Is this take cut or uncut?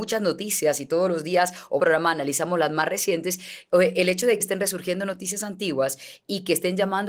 cut